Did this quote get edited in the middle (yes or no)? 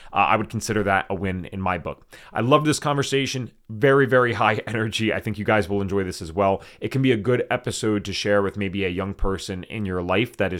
no